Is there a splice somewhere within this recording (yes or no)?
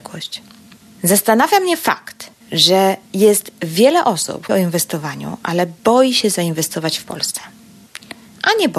yes